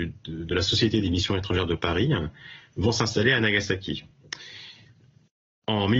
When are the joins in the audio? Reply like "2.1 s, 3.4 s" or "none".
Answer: none